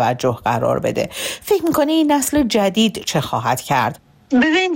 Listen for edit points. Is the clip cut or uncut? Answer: uncut